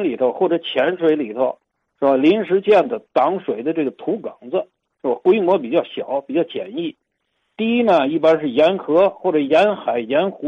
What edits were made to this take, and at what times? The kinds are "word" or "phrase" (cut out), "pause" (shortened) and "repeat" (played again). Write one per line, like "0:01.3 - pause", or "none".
none